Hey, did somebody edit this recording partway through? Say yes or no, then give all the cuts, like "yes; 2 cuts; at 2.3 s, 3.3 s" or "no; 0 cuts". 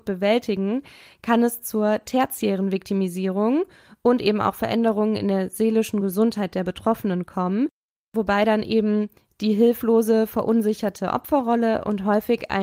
no; 0 cuts